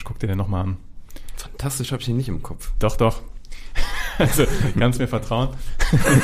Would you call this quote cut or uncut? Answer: uncut